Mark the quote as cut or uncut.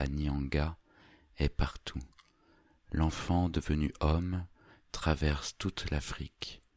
uncut